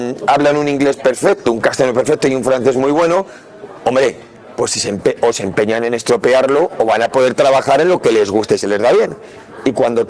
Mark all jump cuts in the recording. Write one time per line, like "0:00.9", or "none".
none